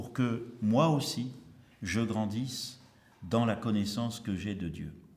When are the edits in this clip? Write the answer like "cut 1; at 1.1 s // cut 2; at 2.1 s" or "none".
none